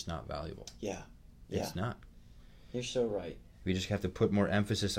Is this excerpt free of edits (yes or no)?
yes